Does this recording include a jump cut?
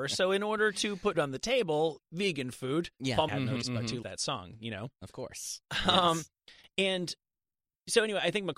yes; 5 cuts; at 1.1 s, 2.0 s, 3.3 s, 3.6 s, 4.0 s

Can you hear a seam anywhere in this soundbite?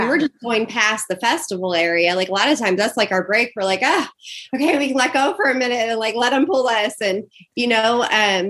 no; 0 cuts

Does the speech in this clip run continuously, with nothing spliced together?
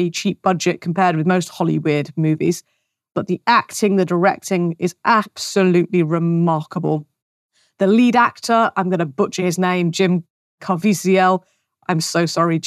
yes; 0 cuts

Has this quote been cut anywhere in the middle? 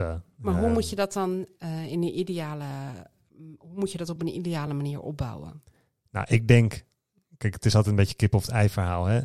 no; 0 cuts

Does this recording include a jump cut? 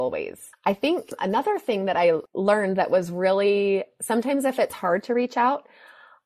no; 0 cuts

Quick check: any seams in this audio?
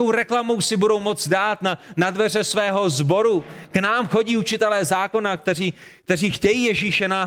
no; 0 cuts

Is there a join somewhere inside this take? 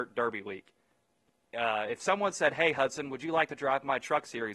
no; 0 cuts

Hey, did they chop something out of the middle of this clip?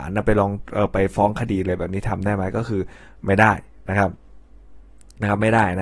no; 0 cuts

